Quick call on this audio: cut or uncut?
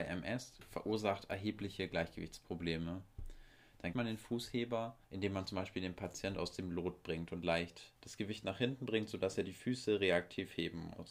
cut